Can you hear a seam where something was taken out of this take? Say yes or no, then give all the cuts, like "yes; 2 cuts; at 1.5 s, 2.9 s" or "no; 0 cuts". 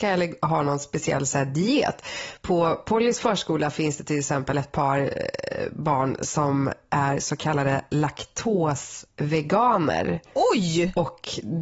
yes; 1 cut; at 10.3 s